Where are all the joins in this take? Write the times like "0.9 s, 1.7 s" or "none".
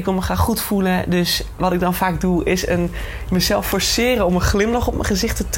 1.6 s